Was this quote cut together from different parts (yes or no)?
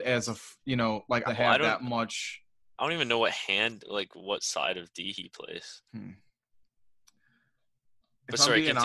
yes